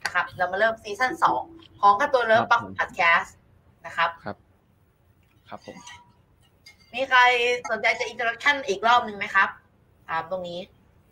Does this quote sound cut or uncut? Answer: uncut